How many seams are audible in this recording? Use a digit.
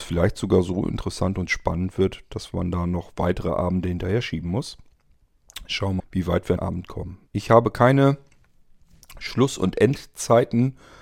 3